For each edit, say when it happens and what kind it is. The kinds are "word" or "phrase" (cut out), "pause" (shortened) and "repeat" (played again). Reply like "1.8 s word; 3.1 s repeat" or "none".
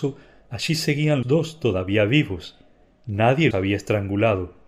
1.2 s word; 3.5 s word